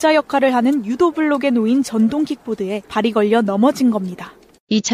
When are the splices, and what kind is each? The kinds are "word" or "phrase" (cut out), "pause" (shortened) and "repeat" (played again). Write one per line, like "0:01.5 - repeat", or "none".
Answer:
0:02.9 - pause